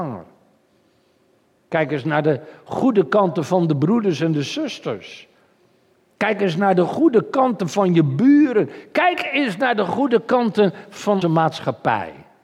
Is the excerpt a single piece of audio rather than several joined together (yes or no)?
no